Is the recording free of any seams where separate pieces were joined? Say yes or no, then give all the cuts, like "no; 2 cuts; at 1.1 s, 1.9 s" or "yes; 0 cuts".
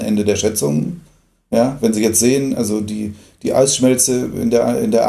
yes; 0 cuts